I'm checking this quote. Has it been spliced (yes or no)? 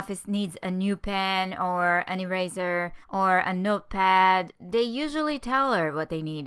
yes